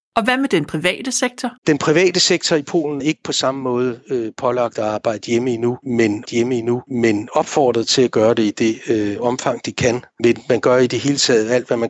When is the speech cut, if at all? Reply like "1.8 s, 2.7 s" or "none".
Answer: 1.6 s, 3.0 s, 6.2 s